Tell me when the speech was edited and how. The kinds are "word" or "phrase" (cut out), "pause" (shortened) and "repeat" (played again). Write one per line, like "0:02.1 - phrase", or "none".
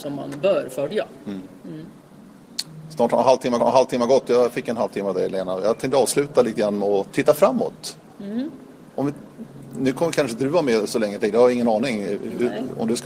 0:03.6 - repeat